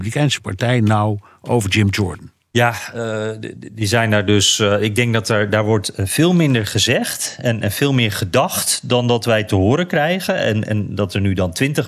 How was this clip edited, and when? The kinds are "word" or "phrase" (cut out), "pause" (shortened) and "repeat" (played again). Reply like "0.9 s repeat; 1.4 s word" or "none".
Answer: none